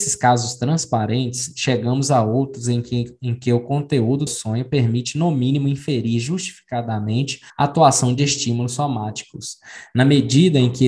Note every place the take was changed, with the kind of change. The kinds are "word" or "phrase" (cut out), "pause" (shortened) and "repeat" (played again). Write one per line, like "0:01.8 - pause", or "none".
0:04.3 - word
0:07.5 - pause